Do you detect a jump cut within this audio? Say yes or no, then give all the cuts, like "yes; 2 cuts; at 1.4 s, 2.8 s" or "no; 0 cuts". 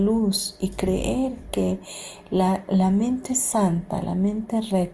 no; 0 cuts